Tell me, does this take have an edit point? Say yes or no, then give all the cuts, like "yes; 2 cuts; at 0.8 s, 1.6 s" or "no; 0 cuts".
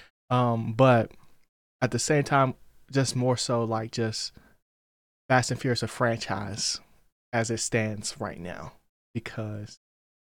no; 0 cuts